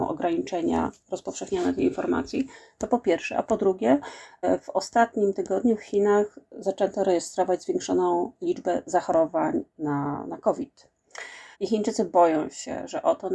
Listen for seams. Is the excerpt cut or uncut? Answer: cut